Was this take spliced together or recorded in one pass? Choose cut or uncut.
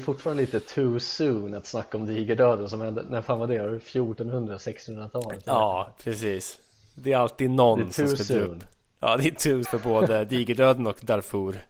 cut